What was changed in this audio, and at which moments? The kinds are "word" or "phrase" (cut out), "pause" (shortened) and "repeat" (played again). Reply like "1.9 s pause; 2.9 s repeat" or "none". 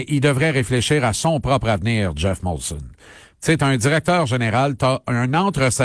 none